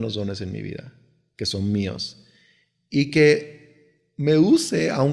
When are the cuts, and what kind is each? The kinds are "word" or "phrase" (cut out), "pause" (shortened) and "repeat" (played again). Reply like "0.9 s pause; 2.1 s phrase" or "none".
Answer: none